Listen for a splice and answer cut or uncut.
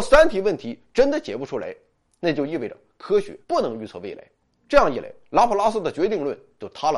cut